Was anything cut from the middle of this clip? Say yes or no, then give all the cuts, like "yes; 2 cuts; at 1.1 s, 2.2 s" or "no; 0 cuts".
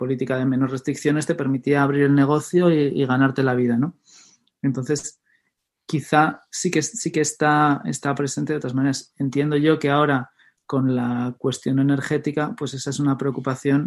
no; 0 cuts